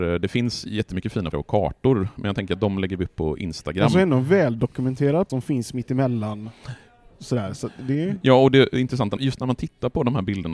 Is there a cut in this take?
yes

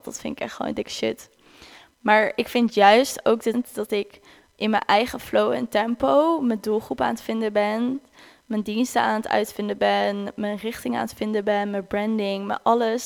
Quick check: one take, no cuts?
no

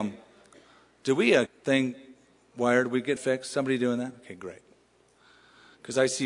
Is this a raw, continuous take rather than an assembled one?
no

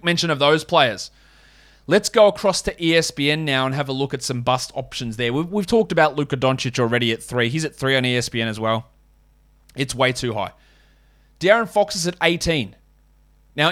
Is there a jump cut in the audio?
no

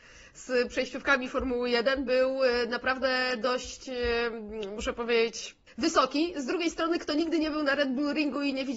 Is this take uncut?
no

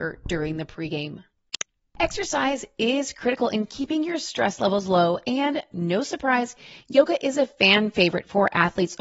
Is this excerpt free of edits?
yes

